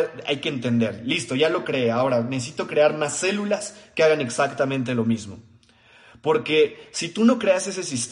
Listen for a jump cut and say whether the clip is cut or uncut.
uncut